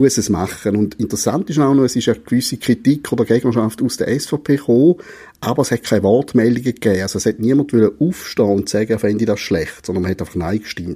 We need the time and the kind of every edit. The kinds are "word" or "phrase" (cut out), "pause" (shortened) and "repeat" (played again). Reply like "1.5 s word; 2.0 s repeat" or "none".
none